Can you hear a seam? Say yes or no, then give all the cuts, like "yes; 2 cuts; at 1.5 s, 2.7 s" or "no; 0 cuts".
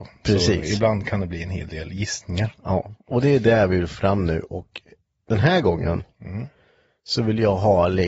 no; 0 cuts